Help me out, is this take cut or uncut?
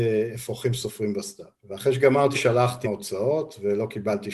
cut